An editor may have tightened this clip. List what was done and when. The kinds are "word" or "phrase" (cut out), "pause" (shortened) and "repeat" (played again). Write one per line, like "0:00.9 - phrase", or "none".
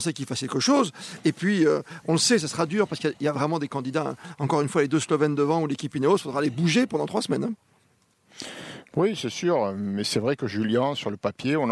none